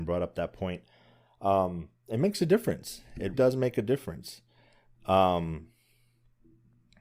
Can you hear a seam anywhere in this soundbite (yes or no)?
yes